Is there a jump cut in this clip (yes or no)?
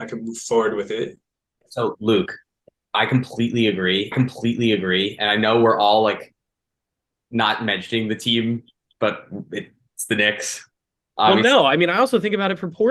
yes